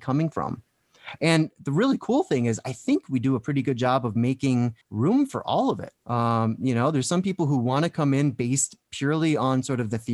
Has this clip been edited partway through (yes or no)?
yes